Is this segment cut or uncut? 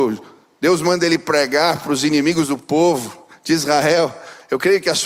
uncut